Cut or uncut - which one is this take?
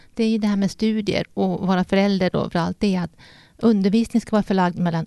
cut